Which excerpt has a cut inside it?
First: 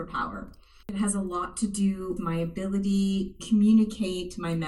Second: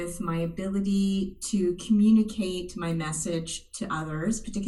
first; 2 cuts; at 2.2 s, 3.4 s

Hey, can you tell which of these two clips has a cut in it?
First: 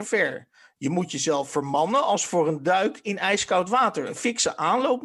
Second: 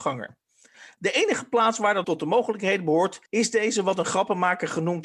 second; 2 cuts; at 2.0 s, 3.3 s

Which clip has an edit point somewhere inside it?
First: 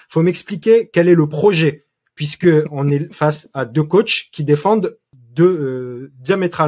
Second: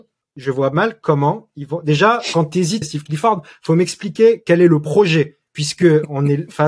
second; 2 cuts; at 2.8 s, 5.5 s

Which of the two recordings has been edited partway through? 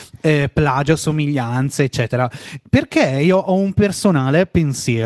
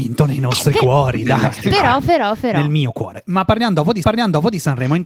second; 1 cut; at 4.0 s

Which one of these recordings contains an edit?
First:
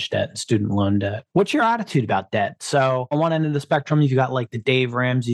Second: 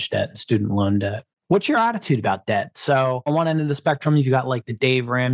first; 1 cut; at 1.3 s

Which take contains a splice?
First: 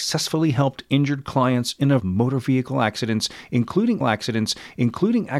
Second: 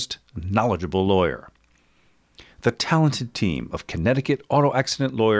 first; 2 cuts; at 2.0 s, 4.0 s

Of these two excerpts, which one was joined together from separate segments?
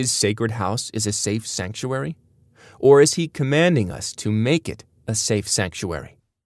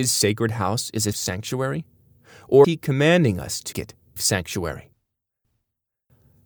second; 4 cuts; at 1.1 s, 2.6 s, 3.7 s, 4.2 s

